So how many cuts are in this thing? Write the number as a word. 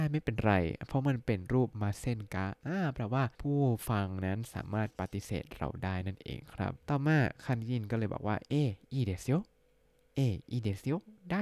two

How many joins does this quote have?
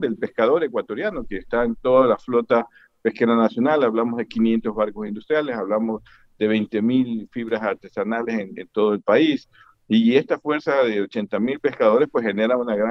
zero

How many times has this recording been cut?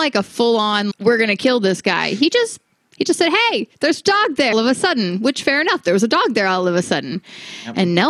two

